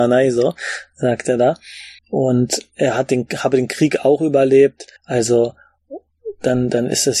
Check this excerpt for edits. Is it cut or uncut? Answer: cut